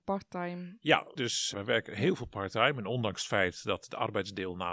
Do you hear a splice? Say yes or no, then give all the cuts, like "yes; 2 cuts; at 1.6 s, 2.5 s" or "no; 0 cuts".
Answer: yes; 2 cuts; at 1.2 s, 1.5 s